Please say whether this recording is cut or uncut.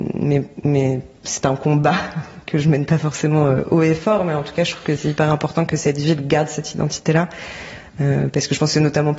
uncut